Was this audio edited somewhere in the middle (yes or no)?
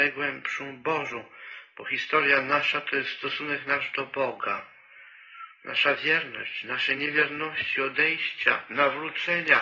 no